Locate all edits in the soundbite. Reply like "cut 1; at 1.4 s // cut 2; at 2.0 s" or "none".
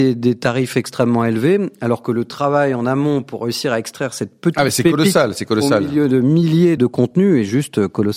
cut 1; at 6.8 s